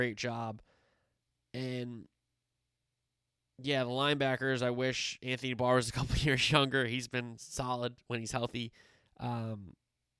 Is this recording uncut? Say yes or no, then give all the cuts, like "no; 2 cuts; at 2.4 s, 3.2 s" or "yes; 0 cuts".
yes; 0 cuts